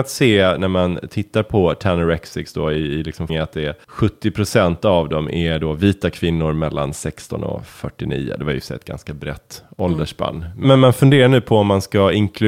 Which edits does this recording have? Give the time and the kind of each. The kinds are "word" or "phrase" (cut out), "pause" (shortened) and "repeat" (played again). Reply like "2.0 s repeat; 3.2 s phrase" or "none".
3.3 s word; 3.8 s pause